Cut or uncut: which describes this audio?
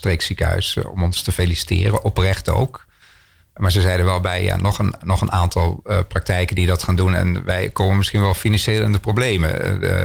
uncut